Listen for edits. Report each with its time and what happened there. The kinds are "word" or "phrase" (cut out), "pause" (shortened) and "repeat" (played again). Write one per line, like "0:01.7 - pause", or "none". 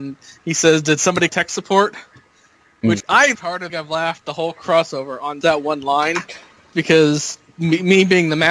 0:01.3 - word
0:03.0 - word
0:03.3 - word
0:03.7 - phrase
0:05.4 - word
0:06.7 - word